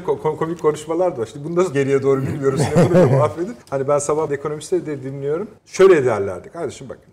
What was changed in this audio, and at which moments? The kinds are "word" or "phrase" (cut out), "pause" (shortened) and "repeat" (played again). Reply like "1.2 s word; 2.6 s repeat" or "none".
1.7 s word; 3.6 s pause; 4.3 s word; 5.6 s pause